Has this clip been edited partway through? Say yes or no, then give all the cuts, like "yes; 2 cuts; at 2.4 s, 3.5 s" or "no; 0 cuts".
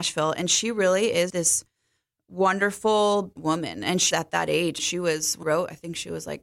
yes; 5 cuts; at 1.3 s, 3.4 s, 4.1 s, 4.8 s, 5.4 s